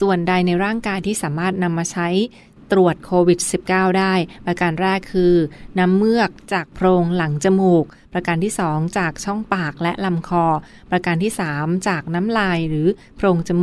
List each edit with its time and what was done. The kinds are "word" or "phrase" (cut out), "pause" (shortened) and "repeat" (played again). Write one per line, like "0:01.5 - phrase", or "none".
none